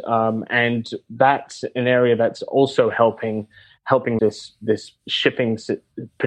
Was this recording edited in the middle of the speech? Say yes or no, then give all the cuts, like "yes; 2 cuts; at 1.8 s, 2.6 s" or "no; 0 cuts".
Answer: yes; 1 cut; at 4.2 s